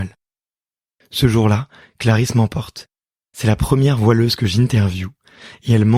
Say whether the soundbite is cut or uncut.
uncut